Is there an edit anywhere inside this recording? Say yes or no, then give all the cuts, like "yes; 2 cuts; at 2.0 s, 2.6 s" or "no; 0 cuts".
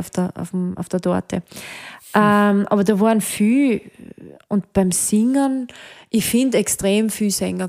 no; 0 cuts